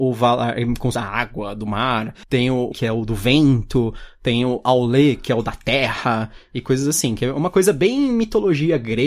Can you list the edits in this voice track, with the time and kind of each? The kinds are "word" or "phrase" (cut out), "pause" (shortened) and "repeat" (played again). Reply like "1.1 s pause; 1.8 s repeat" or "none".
0.9 s phrase; 2.2 s pause; 2.7 s word